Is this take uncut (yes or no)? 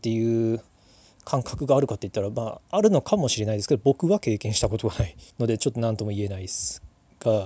no